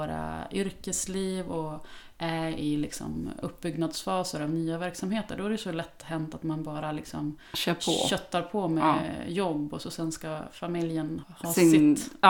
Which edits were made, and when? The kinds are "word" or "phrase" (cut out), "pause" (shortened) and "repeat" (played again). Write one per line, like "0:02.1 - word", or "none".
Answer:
0:11.2 - word